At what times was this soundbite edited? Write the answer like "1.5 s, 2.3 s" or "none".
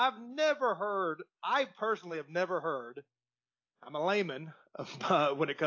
none